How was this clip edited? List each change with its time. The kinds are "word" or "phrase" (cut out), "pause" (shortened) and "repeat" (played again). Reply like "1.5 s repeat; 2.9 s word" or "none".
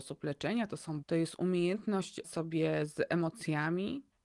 1.0 s word; 2.2 s word

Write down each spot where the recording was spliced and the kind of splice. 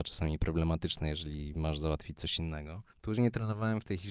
2.9 s pause

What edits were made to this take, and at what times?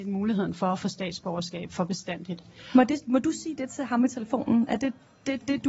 none

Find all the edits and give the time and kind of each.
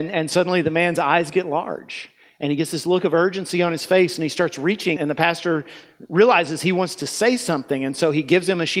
5.0 s word

